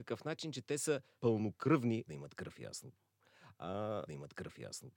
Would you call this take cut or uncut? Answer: cut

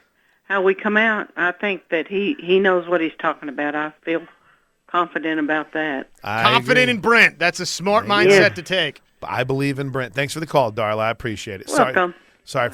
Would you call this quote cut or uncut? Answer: uncut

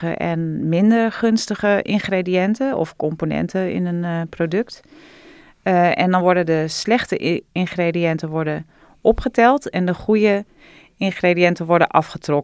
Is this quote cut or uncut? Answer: uncut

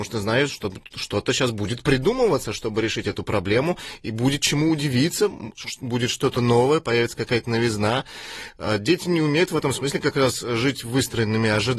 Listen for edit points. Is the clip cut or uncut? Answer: uncut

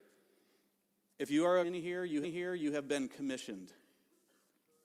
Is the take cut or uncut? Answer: cut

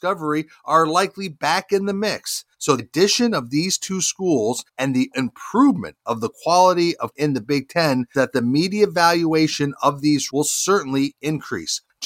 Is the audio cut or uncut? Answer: cut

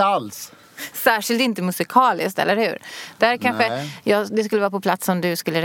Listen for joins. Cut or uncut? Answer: uncut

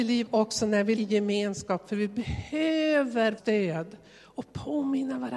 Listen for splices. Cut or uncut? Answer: cut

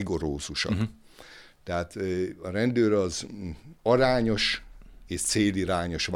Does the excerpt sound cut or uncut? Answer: cut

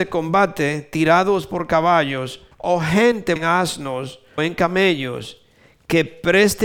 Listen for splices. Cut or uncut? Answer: cut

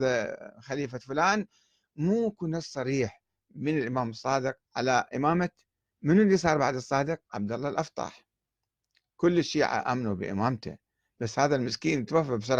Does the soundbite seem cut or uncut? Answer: cut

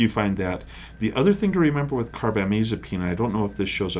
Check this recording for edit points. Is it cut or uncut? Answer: uncut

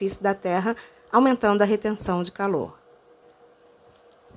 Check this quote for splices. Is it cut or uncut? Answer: uncut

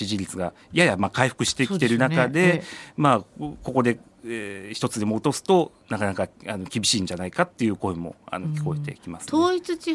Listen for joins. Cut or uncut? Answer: uncut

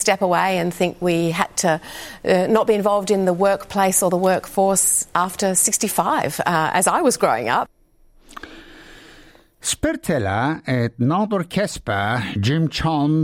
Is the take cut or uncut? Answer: uncut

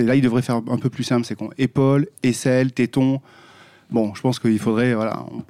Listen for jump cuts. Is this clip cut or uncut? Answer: uncut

